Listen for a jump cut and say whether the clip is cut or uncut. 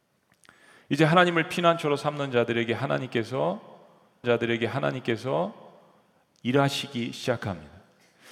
cut